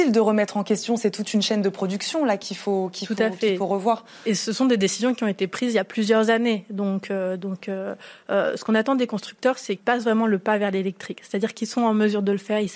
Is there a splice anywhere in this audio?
yes; 1 cut; at 9.8 s

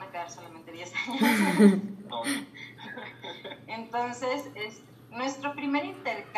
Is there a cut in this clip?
no; 0 cuts

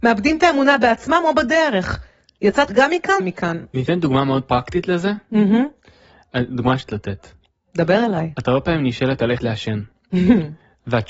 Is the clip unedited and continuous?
no; 4 cuts; at 2.7 s, 3.2 s, 6.9 s, 9.4 s

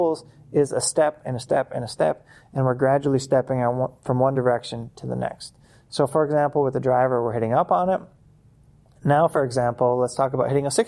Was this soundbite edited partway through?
no; 0 cuts

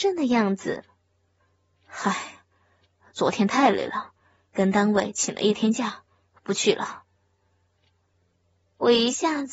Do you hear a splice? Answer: no; 0 cuts

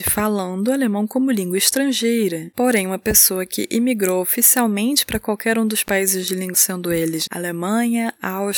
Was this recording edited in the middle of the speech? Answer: yes; 2 cuts; at 6.5 s, 7.3 s

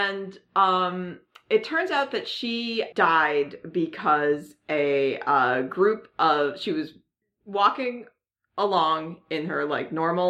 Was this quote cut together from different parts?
yes; 1 cut; at 2.9 s

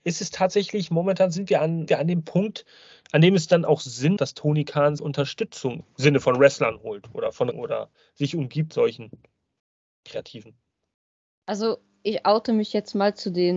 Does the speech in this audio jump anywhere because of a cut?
yes; 6 cuts; at 1.9 s, 4.2 s, 5.0 s, 5.8 s, 7.5 s, 8.7 s

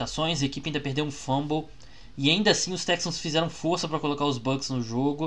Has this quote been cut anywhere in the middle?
no; 0 cuts

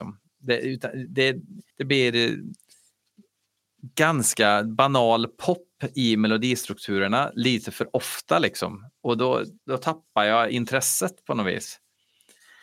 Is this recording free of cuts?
no; 2 cuts; at 1.7 s, 9.6 s

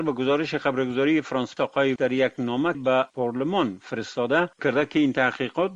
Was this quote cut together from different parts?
yes; 5 cuts; at 1.6 s, 2.0 s, 2.7 s, 3.1 s, 4.6 s

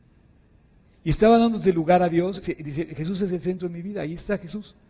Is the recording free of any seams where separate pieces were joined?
no; 1 cut; at 2.4 s

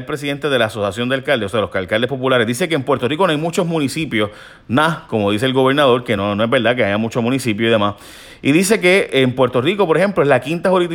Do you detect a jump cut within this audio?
no; 0 cuts

